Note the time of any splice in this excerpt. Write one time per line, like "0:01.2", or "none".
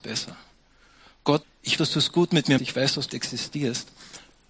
0:01.4
0:01.8
0:02.6
0:03.1